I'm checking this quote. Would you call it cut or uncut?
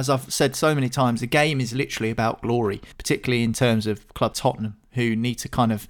cut